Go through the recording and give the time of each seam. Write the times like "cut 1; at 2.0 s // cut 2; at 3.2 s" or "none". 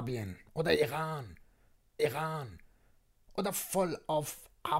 cut 1; at 2.0 s